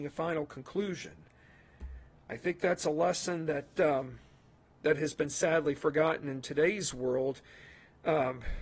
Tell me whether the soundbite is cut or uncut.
uncut